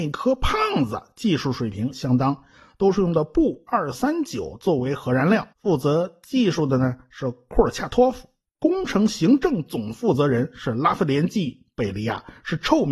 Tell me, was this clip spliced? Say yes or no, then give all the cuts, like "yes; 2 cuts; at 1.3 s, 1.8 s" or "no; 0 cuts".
yes; 1 cut; at 5.5 s